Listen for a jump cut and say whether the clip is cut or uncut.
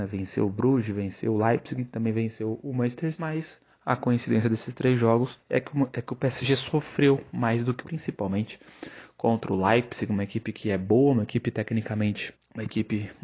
cut